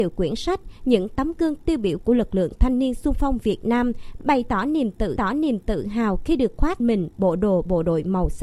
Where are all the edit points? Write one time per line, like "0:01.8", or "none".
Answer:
0:05.2
0:06.8